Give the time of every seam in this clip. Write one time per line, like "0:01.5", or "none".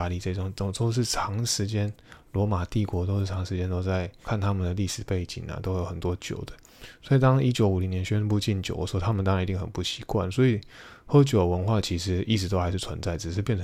0:04.2